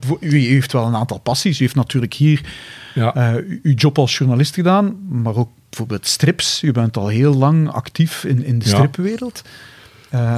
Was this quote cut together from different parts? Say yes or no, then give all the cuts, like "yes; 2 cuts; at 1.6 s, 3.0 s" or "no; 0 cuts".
no; 0 cuts